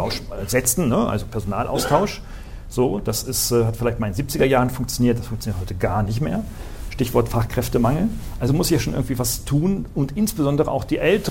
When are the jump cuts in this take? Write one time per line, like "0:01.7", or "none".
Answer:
none